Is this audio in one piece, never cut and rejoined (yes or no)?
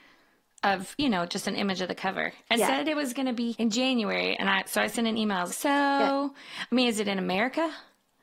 no